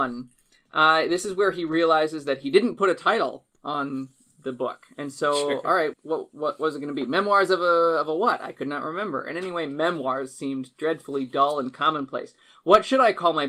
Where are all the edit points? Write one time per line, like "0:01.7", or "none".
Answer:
0:05.9